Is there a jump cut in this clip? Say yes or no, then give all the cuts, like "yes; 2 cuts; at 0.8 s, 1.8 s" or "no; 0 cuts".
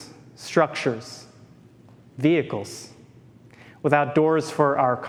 no; 0 cuts